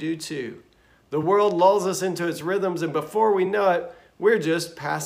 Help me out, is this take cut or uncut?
uncut